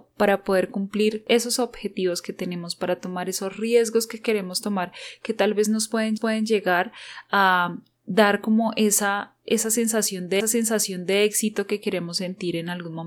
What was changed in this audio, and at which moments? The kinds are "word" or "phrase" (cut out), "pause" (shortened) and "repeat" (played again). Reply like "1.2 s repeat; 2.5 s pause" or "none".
6.2 s repeat; 10.4 s repeat

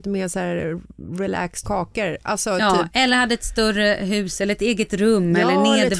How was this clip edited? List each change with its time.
1.6 s phrase

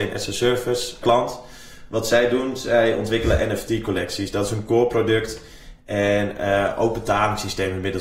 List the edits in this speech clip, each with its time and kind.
1.0 s word

